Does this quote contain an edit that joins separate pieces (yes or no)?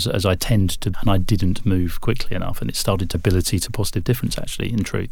yes